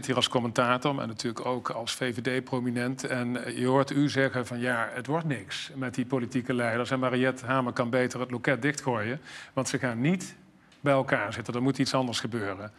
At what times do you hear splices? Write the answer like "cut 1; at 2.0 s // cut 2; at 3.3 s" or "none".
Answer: none